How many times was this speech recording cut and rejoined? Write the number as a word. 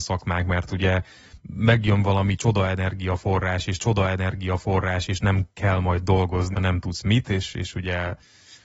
two